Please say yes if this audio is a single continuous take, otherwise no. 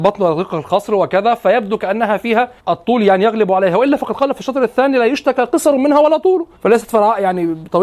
no